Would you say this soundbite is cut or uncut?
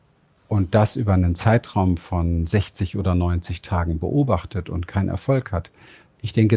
uncut